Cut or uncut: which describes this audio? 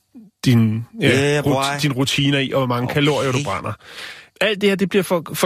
uncut